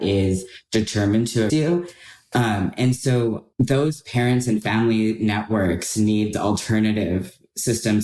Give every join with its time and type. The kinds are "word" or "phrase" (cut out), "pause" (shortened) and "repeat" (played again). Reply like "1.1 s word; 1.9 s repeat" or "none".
1.5 s word; 3.5 s pause; 6.3 s word

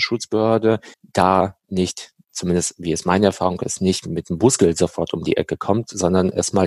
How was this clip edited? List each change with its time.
0.9 s pause

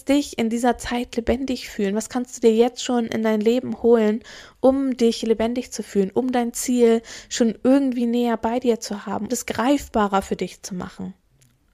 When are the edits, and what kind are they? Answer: 9.3 s word

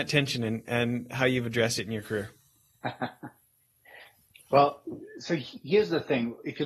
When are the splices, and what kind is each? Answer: none

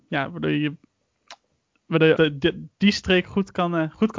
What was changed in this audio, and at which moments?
2.2 s word

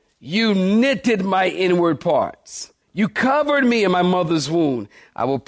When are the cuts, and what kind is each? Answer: 2.8 s pause

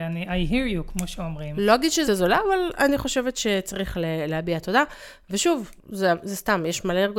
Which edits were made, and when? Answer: 2.1 s word; 5.8 s pause

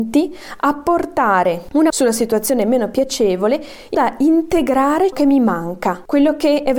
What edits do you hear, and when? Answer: 1.9 s word; 3.9 s word; 5.1 s word

